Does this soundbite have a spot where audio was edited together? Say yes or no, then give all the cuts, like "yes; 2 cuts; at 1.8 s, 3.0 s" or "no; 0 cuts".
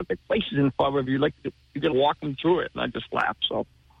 yes; 1 cut; at 1.9 s